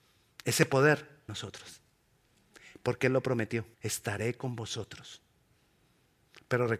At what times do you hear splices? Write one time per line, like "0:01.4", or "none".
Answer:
0:01.3
0:03.7